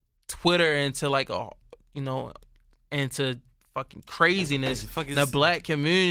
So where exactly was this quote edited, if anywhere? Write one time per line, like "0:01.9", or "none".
0:03.5